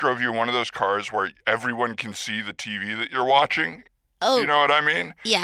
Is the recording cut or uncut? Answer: uncut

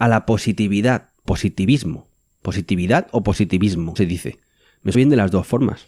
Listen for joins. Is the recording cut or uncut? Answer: cut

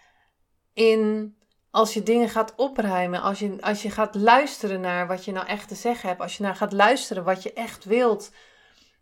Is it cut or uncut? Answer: uncut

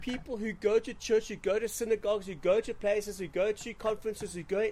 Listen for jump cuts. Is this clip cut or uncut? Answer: uncut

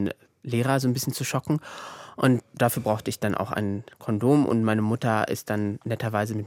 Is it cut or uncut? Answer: uncut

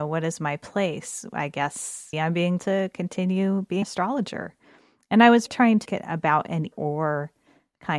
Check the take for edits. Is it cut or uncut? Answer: cut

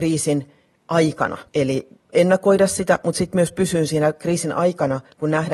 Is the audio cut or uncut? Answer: cut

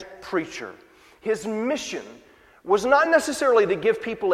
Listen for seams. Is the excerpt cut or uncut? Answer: uncut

